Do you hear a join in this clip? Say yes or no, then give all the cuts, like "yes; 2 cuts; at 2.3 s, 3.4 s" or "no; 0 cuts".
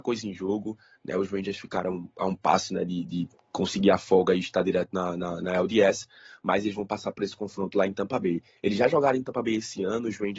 no; 0 cuts